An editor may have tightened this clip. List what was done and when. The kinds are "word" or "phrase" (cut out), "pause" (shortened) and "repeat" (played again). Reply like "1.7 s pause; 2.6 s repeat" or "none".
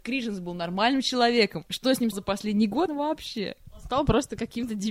2.1 s word; 2.9 s word